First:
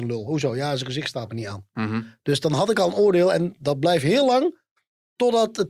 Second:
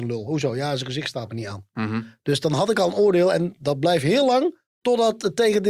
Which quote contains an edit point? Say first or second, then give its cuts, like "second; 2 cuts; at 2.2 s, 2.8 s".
second; 1 cut; at 4.7 s